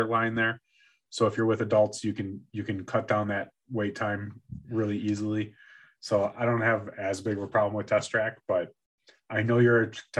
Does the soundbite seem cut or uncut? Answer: uncut